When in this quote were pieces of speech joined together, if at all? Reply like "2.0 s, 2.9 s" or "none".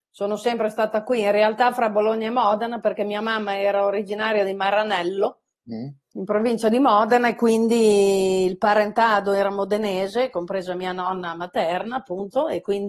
6.0 s